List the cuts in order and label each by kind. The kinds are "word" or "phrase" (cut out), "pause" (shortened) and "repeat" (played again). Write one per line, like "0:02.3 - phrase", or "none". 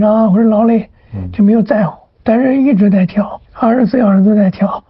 0:02.1 - pause
0:03.4 - pause